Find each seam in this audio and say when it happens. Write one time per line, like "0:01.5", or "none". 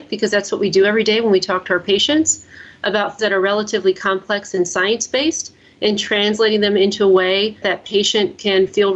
0:03.2
0:07.6